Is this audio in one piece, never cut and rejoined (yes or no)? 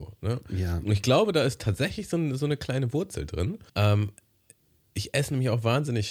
no